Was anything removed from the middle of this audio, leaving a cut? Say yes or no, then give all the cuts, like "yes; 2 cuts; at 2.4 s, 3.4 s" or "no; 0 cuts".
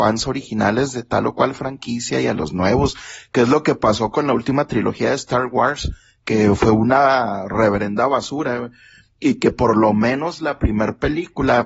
no; 0 cuts